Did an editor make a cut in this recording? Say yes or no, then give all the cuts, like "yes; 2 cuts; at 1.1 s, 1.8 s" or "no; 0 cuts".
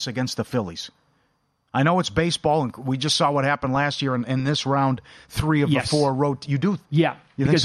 no; 0 cuts